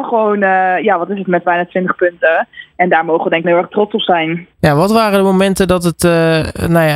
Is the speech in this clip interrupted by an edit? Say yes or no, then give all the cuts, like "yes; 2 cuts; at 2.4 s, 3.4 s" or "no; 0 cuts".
yes; 3 cuts; at 1.4 s, 3.4 s, 4.5 s